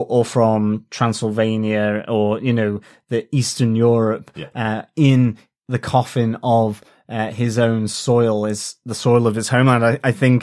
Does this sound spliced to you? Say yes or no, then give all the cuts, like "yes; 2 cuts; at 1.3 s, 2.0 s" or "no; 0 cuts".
no; 0 cuts